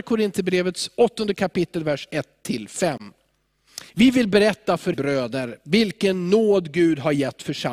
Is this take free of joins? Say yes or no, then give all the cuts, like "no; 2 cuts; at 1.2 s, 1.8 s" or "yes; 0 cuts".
no; 2 cuts; at 3.9 s, 4.9 s